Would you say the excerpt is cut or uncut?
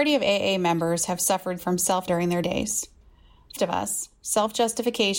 cut